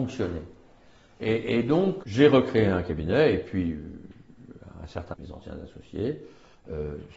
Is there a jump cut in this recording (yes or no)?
yes